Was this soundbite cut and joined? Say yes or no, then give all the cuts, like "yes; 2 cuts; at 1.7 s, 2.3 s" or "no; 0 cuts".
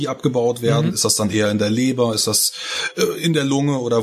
no; 0 cuts